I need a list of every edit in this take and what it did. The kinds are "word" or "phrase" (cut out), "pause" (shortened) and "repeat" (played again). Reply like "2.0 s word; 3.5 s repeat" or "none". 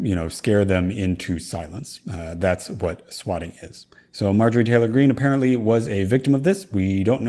none